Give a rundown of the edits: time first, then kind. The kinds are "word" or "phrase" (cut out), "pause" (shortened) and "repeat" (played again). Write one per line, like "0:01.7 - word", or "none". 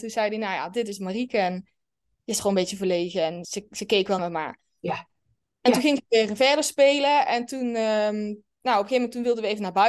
0:02.4 - word
0:03.4 - word
0:04.2 - word